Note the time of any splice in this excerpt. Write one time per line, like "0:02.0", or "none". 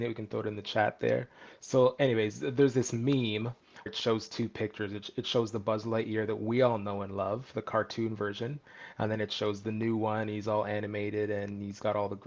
0:03.9